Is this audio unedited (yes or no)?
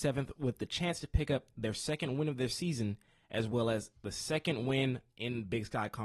yes